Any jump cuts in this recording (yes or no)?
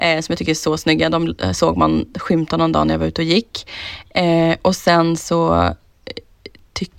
no